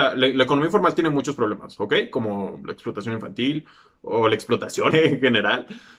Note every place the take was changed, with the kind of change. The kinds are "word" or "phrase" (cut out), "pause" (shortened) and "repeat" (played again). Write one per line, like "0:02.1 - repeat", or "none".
0:04.9 - word